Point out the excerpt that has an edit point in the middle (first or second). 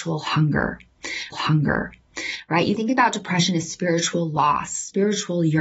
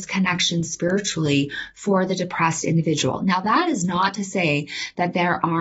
first